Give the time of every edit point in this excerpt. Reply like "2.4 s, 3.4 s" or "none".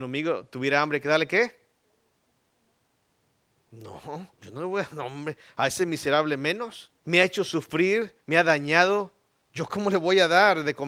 4.3 s, 7.0 s, 8.2 s